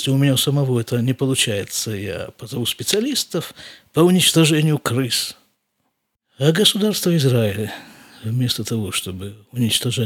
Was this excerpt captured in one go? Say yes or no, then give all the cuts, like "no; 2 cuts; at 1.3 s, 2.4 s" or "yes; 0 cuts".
yes; 0 cuts